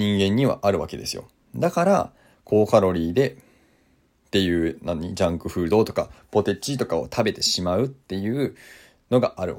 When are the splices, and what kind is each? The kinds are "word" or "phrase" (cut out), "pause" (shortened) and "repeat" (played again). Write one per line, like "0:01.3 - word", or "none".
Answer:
none